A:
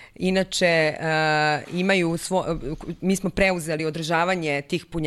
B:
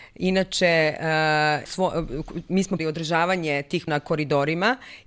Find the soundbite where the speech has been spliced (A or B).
B